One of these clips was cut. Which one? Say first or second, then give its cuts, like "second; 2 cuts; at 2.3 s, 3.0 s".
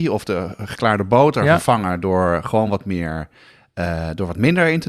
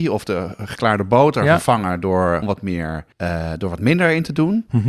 second; 2 cuts; at 2.4 s, 3.1 s